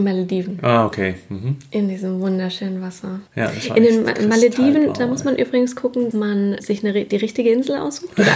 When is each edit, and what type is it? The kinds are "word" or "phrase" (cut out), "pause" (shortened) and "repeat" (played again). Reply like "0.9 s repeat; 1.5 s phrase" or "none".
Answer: 3.3 s pause; 6.1 s word; 6.6 s word